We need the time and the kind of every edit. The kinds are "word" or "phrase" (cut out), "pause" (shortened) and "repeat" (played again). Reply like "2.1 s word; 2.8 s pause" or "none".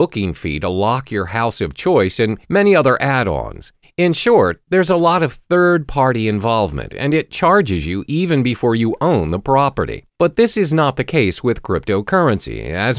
2.4 s pause; 3.8 s pause; 10.1 s pause

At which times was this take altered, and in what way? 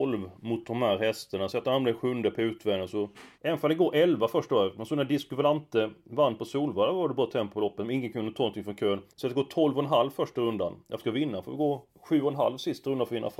3.3 s pause; 9.1 s pause; 11.0 s word

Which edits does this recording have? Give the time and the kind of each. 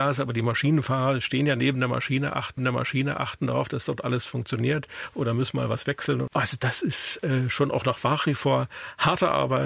2.6 s repeat

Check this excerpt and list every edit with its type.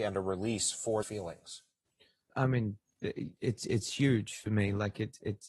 1.0 s word; 2.3 s word; 3.4 s pause

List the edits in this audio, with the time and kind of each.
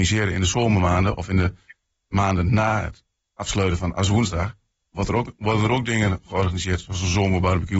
none

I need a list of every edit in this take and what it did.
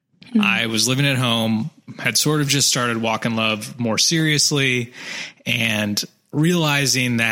none

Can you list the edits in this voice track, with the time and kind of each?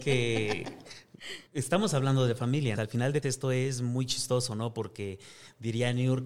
1.5 s pause; 2.8 s word; 3.2 s word

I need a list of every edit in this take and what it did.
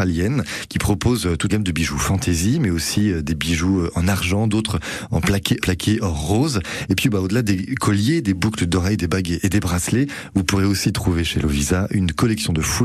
1.5 s word; 5.6 s word

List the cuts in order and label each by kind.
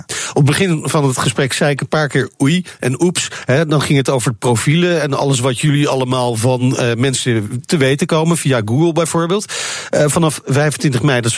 none

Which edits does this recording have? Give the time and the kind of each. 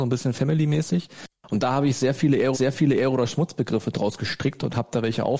2.5 s repeat

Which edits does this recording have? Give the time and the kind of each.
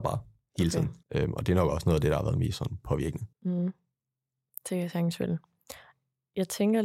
1.0 s pause; 3.3 s pause

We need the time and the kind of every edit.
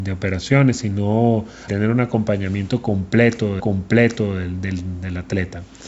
1.7 s word; 3.6 s repeat

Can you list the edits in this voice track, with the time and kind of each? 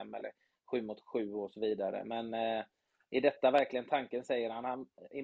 none

